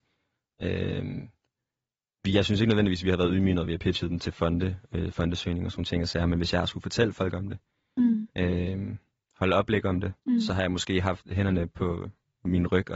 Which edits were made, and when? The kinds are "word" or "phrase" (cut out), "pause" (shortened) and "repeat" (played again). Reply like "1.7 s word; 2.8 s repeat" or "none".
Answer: 10.2 s pause

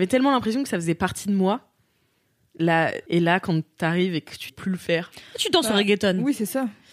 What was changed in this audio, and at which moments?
3.1 s phrase; 4.5 s word

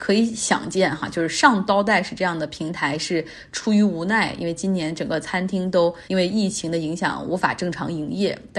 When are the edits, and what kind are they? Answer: 6.0 s pause

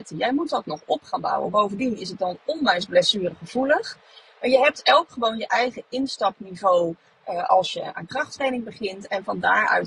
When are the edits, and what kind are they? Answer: none

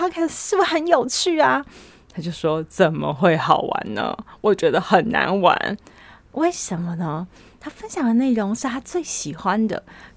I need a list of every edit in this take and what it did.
none

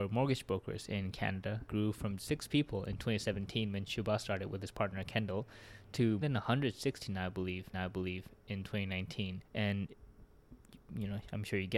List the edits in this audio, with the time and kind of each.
1.7 s word; 2.2 s word; 6.2 s word; 7.7 s repeat; 9.4 s pause

